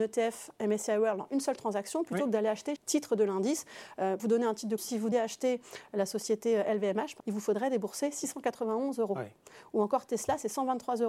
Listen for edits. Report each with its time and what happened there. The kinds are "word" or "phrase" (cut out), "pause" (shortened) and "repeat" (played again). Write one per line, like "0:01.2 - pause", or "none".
0:02.8 - word
0:04.2 - word
0:04.8 - word
0:05.1 - word
0:07.2 - word